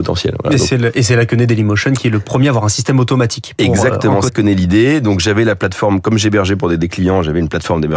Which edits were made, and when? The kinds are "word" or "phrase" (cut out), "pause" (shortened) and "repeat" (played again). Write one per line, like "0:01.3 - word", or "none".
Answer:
0:04.3 - word